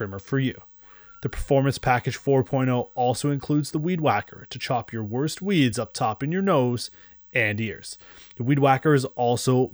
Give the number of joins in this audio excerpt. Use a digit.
0